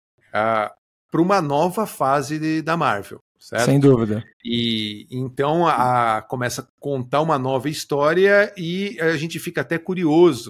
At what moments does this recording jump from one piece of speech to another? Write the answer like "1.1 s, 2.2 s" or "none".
3.3 s, 4.3 s, 6.7 s

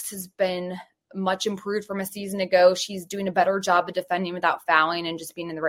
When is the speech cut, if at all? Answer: none

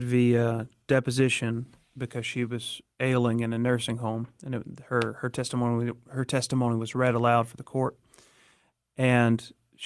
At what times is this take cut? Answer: none

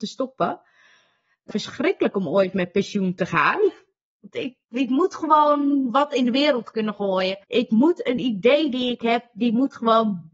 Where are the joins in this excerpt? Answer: 1.5 s, 4.6 s, 7.4 s

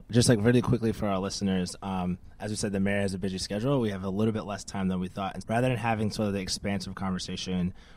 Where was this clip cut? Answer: 5.4 s

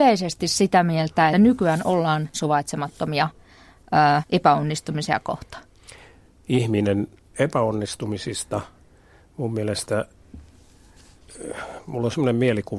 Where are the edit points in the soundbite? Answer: 1.3 s, 2.3 s, 4.2 s, 7.3 s

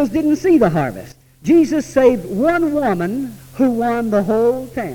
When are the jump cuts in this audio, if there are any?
none

